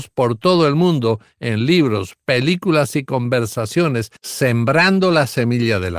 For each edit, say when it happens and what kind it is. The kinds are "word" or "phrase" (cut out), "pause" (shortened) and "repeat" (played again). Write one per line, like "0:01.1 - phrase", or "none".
0:04.2 - pause